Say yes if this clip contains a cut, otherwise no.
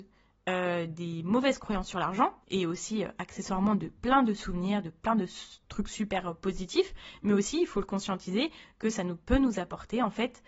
yes